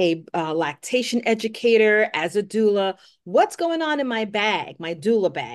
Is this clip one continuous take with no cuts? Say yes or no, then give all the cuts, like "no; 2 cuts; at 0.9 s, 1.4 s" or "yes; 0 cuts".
yes; 0 cuts